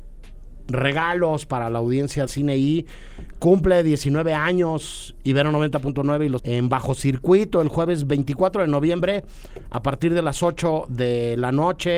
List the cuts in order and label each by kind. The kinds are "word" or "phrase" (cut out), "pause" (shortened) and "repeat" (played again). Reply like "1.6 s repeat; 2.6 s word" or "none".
2.3 s word; 6.4 s word